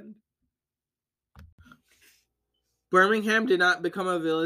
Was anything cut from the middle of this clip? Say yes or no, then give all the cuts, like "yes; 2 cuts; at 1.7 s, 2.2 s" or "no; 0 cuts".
no; 0 cuts